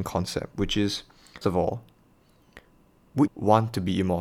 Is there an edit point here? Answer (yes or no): yes